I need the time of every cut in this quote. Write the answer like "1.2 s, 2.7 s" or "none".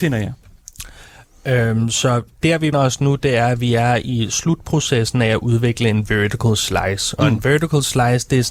2.7 s